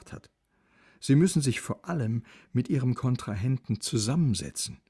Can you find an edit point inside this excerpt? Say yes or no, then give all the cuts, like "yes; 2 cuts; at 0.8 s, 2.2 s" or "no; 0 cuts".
no; 0 cuts